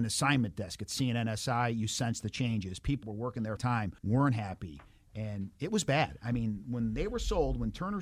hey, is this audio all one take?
no; 3 cuts; at 3.0 s, 3.6 s, 4.0 s

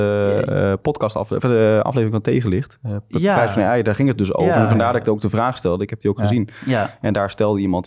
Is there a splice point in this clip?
no; 0 cuts

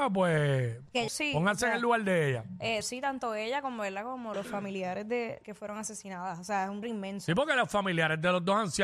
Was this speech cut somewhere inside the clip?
yes; 5 cuts; at 1.1 s, 2.8 s, 4.3 s, 5.4 s, 6.8 s

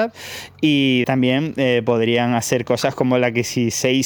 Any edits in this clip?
yes; 1 cut; at 1.0 s

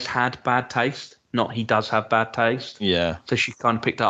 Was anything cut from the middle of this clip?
no; 0 cuts

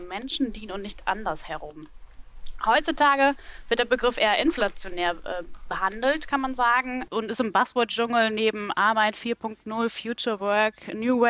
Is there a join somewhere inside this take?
no; 0 cuts

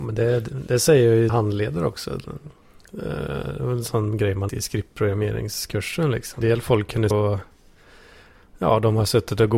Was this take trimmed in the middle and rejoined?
yes; 4 cuts; at 1.3 s, 4.5 s, 6.4 s, 7.1 s

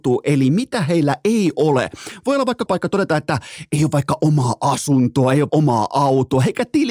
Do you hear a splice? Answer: yes; 2 cuts; at 2.7 s, 5.5 s

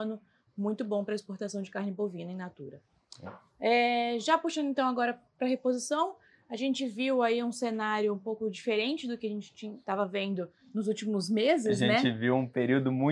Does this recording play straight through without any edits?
yes; 0 cuts

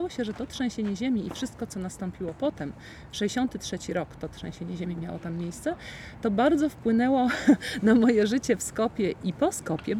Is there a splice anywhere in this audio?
no; 0 cuts

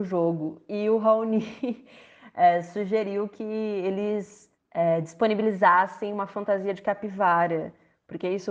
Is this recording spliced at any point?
no; 0 cuts

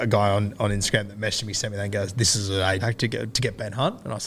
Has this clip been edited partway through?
yes; 1 cut; at 2.8 s

